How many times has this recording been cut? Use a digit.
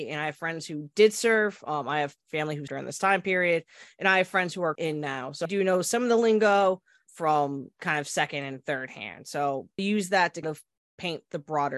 6